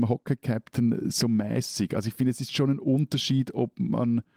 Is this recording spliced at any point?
no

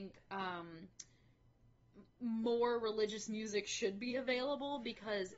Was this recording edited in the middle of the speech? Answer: no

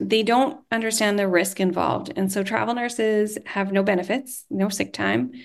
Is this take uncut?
yes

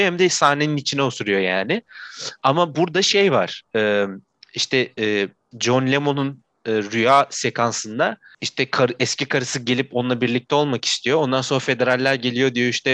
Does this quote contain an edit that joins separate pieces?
no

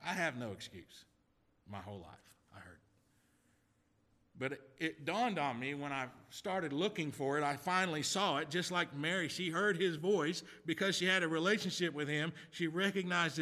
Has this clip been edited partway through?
no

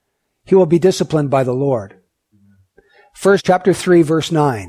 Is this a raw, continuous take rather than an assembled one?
no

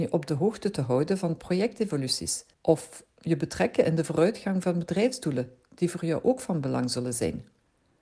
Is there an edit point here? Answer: yes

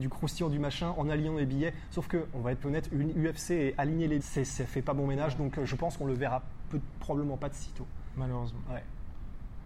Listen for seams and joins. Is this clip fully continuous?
no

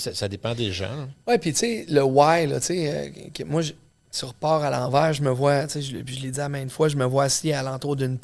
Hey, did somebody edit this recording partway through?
no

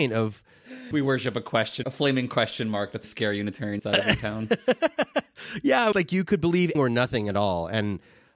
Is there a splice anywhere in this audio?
yes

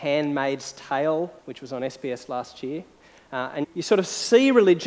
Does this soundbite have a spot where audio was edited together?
yes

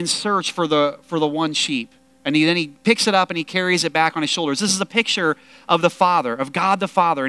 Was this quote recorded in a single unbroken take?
yes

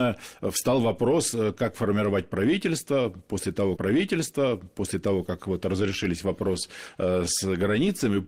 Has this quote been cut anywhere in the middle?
yes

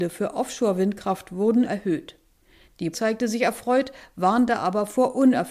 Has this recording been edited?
yes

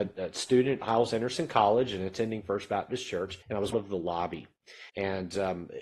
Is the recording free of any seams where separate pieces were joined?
no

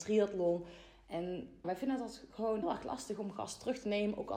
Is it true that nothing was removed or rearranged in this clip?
no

